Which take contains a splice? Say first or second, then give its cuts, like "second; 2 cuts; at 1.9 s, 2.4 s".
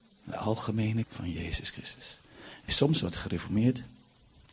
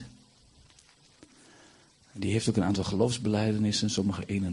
first; 2 cuts; at 1.0 s, 2.7 s